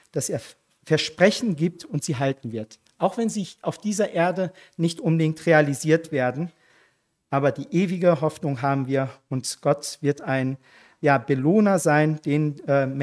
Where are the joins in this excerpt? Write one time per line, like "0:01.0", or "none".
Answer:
none